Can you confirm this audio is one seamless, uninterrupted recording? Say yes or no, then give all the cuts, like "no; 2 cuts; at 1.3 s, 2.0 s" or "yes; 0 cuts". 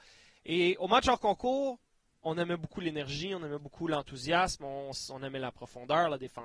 yes; 0 cuts